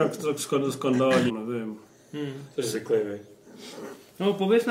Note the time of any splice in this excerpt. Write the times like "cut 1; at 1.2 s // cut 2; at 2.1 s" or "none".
cut 1; at 1.3 s